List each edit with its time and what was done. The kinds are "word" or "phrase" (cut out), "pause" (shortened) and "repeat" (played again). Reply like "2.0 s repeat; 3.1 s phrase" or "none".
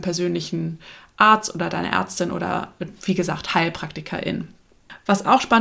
none